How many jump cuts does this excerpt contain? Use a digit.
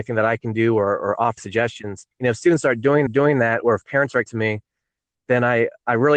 4